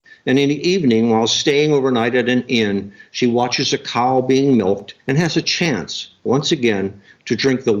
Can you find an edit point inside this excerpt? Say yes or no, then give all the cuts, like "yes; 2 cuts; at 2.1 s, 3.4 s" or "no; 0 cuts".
yes; 1 cut; at 5.0 s